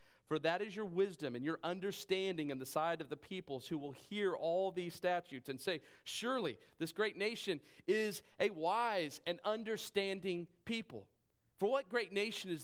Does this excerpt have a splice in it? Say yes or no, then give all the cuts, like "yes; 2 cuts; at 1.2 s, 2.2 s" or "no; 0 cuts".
no; 0 cuts